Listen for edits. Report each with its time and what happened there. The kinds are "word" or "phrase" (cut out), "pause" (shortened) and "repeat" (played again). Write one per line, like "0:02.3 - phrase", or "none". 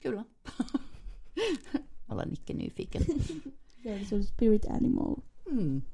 0:02.1 - word